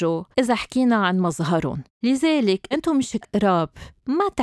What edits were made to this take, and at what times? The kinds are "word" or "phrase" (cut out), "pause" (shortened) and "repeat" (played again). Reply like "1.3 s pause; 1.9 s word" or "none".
2.7 s word; 3.2 s word